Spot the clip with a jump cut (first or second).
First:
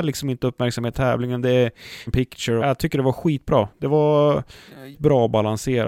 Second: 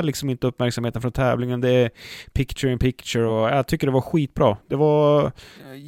first